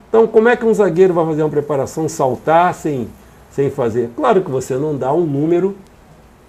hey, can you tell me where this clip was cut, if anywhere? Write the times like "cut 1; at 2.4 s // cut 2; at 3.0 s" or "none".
cut 1; at 2.1 s